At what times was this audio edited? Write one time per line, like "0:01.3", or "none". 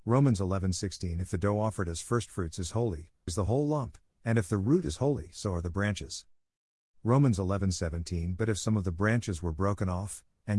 0:03.3